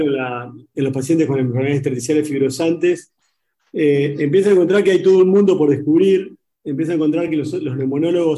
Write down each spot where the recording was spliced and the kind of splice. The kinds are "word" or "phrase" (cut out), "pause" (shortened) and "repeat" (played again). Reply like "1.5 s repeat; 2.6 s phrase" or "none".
none